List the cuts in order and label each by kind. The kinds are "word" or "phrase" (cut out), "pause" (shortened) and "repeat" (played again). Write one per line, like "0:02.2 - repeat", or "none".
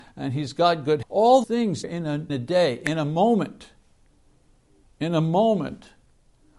0:01.0 - word
0:01.4 - word
0:01.8 - word
0:02.3 - word